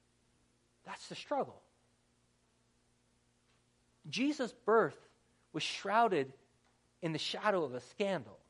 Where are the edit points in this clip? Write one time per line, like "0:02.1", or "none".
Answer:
none